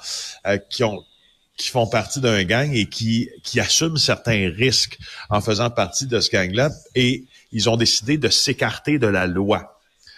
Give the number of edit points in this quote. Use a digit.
0